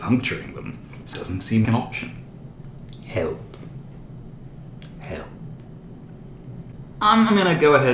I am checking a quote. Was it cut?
yes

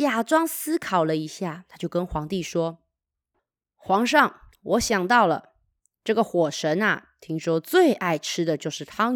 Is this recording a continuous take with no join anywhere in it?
yes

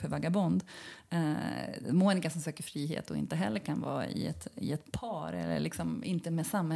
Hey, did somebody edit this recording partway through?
no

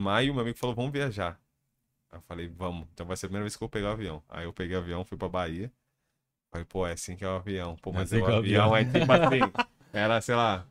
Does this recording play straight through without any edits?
yes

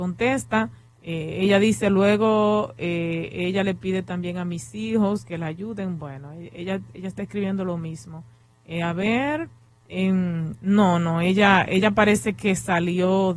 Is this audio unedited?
yes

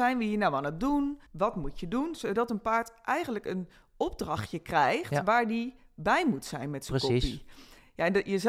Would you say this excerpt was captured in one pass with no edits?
no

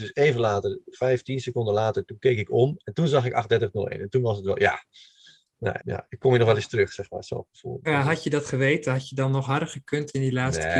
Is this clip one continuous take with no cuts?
no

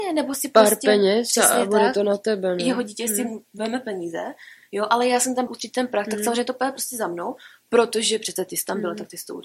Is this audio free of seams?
no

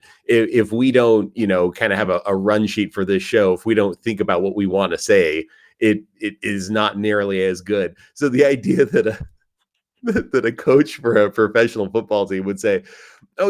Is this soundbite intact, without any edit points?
yes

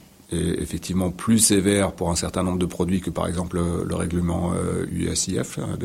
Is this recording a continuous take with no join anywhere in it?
yes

